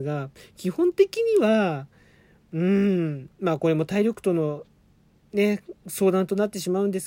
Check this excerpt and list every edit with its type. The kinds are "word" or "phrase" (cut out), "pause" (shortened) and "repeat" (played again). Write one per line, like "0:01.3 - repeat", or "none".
0:05.8 - pause